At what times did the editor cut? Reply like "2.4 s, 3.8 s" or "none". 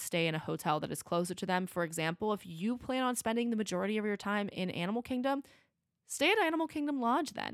none